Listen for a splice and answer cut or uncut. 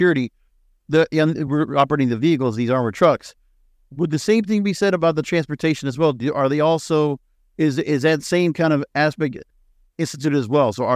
uncut